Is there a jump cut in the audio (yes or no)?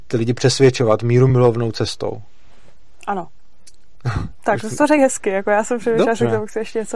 no